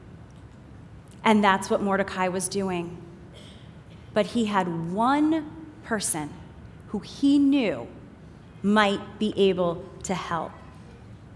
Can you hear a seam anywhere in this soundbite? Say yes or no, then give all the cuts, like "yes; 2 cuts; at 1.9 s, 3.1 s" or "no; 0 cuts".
no; 0 cuts